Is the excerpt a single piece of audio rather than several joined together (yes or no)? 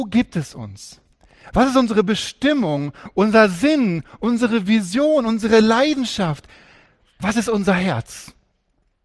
yes